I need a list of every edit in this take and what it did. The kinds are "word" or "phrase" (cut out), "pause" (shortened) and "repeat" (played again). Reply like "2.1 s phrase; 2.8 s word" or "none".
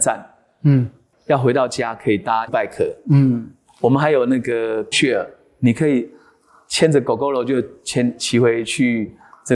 2.5 s word; 4.9 s word